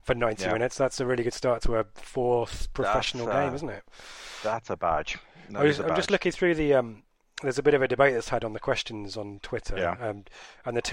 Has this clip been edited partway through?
no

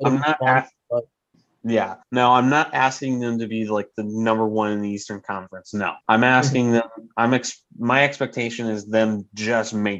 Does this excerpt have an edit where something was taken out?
yes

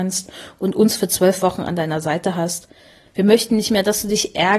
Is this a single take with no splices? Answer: yes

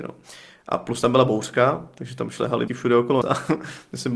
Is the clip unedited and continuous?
no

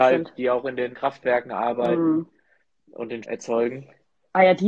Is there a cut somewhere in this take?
yes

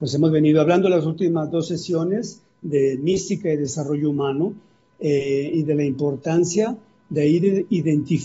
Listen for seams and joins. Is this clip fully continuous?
yes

